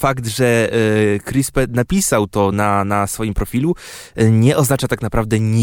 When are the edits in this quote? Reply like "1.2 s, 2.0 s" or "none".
none